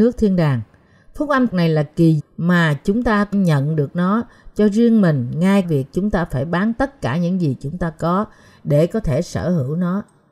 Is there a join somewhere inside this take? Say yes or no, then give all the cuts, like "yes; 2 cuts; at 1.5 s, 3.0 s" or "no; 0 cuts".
yes; 4 cuts; at 1.5 s, 2.2 s, 3.3 s, 5.6 s